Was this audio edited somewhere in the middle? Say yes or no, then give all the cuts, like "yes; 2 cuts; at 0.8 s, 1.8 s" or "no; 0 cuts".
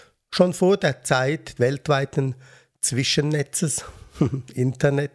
yes; 1 cut; at 1.6 s